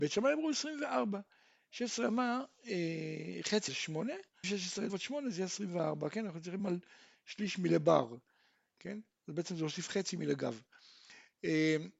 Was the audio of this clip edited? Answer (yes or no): yes